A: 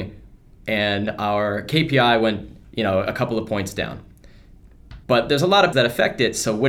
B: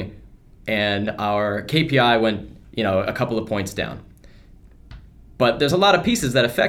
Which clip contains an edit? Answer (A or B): A